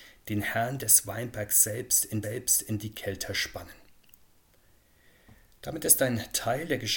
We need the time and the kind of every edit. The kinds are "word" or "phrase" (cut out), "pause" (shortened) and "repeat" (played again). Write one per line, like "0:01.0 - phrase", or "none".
0:02.2 - repeat
0:05.5 - pause